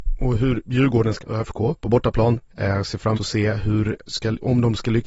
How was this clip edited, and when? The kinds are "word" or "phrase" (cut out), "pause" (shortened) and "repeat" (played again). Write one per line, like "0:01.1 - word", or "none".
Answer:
0:01.2 - word
0:01.8 - pause
0:02.5 - pause
0:03.1 - word
0:04.0 - word